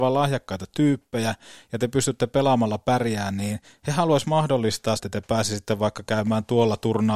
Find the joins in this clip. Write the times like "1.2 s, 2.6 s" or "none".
5.0 s